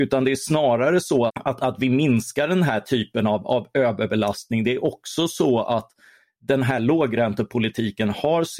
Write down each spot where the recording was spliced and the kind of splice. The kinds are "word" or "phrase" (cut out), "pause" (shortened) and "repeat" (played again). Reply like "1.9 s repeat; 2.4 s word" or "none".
1.3 s word